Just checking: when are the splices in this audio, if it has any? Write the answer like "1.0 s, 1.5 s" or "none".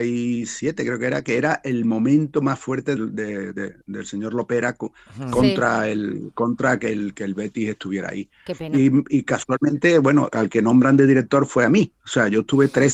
3.0 s, 3.8 s